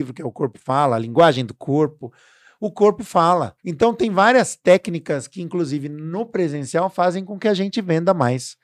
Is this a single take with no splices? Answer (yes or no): no